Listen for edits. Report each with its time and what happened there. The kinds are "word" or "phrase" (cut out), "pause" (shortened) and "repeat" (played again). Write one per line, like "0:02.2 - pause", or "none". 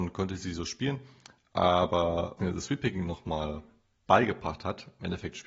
0:02.4 - word